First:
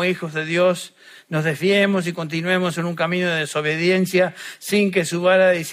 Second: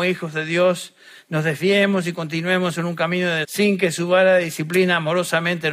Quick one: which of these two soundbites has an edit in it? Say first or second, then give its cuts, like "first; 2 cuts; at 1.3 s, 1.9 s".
second; 1 cut; at 3.4 s